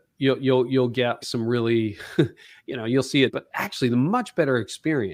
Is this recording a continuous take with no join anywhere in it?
no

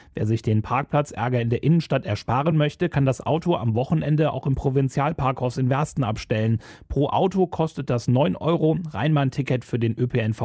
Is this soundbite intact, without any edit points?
yes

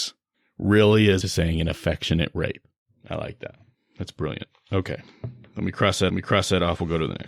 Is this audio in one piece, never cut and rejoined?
no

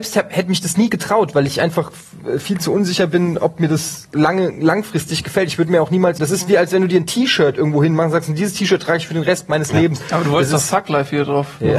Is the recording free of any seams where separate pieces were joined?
no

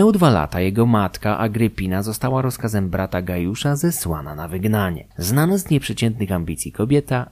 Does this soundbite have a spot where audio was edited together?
yes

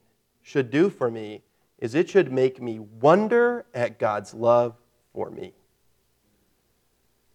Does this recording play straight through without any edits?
yes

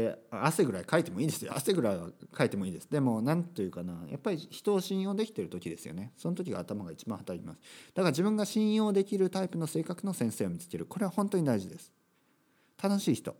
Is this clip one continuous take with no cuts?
yes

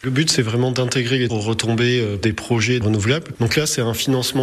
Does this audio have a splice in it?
yes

